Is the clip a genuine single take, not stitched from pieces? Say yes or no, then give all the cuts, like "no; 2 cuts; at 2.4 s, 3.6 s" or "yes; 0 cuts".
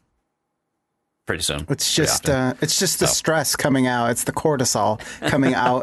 yes; 0 cuts